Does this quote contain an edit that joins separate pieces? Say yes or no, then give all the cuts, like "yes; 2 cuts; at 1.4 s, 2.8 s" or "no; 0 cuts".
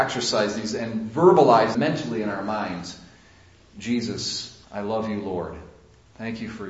yes; 2 cuts; at 1.7 s, 4.6 s